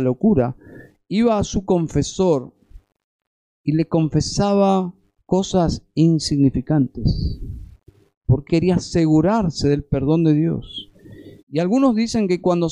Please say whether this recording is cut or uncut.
cut